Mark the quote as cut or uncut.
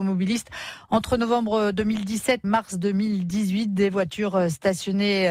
cut